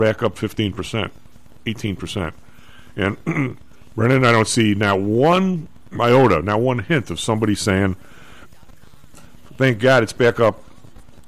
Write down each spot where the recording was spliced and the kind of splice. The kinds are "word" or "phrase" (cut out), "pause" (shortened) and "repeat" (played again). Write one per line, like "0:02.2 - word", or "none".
none